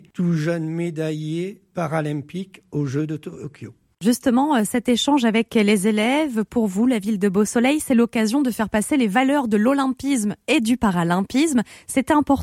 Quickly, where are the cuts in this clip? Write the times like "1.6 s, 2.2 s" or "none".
none